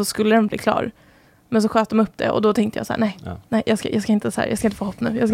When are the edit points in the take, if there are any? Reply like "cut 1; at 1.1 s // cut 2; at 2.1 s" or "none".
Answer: none